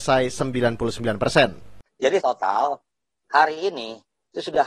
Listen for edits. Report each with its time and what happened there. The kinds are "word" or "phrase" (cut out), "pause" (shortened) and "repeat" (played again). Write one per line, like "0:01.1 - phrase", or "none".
0:02.2 - word